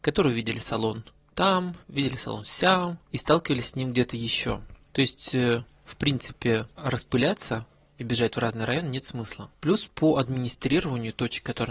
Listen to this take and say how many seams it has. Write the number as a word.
one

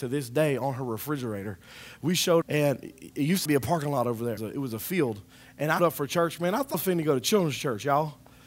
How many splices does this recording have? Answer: five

